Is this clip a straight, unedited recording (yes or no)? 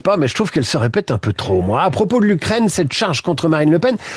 yes